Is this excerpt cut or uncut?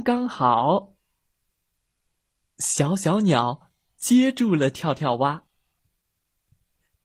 uncut